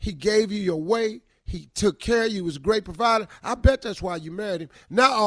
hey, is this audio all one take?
yes; 0 cuts

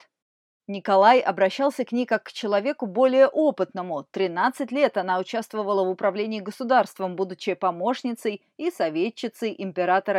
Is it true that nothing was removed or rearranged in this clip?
yes; 0 cuts

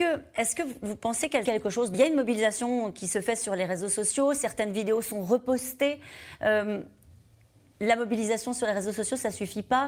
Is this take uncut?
no; 2 cuts; at 1.5 s, 1.9 s

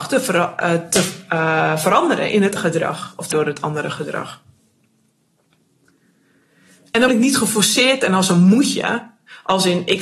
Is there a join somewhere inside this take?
yes; 3 cuts; at 2.6 s, 3.3 s, 7.1 s

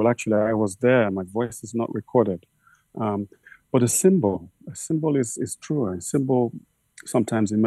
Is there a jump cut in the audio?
no; 0 cuts

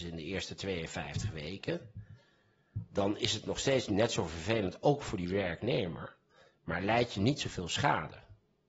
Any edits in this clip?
no; 0 cuts

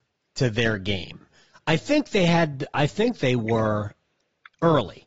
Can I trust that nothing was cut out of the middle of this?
yes; 0 cuts

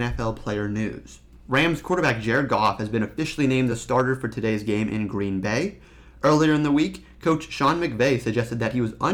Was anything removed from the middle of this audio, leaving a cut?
no; 0 cuts

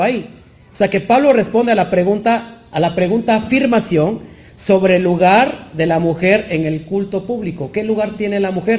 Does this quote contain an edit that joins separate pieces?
no; 0 cuts

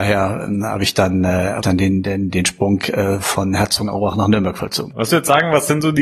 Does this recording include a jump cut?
yes; 3 cuts; at 1.6 s, 2.0 s, 5.1 s

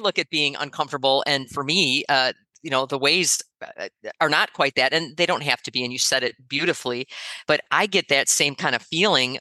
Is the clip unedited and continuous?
yes; 0 cuts

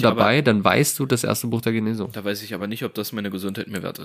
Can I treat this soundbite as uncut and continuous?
yes; 0 cuts

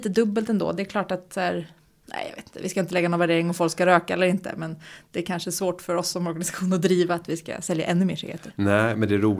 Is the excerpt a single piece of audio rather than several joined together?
no; 1 cut; at 2.0 s

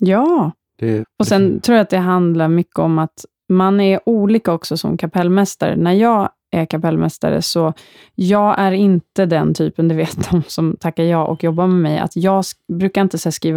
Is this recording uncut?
no; 1 cut; at 1.0 s

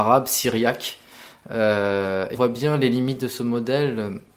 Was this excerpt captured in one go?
no; 1 cut; at 2.3 s

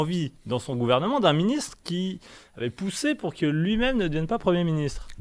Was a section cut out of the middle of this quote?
no; 0 cuts

